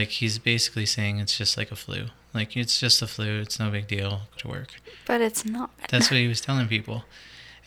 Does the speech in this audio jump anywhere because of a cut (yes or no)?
yes